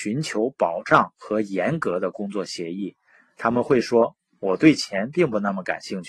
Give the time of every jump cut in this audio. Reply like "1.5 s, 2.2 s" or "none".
none